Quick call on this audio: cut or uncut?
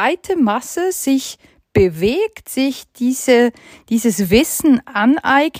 uncut